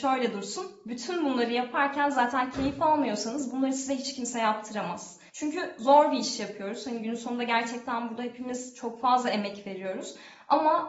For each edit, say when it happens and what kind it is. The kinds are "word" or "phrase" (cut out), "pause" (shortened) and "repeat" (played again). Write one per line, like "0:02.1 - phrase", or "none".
0:05.3 - pause